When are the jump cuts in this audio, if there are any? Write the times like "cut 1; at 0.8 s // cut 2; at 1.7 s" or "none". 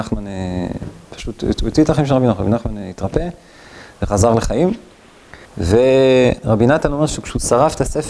cut 1; at 5.4 s